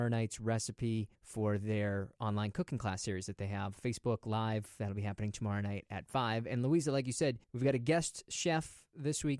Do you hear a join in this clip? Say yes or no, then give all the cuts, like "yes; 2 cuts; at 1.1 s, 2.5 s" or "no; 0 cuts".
yes; 2 cuts; at 1.2 s, 7.4 s